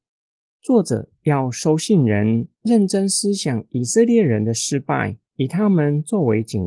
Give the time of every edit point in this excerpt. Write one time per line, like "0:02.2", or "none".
0:02.5
0:05.2